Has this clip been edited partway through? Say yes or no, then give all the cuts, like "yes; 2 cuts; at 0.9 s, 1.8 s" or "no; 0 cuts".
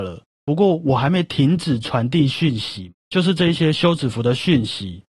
yes; 1 cut; at 3.0 s